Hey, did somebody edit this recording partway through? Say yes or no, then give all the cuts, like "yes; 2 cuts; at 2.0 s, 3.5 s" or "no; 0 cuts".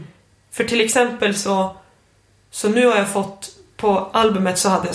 no; 0 cuts